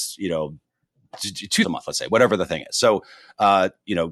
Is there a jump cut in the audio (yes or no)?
yes